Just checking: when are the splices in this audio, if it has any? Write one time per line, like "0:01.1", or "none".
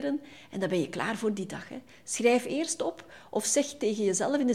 none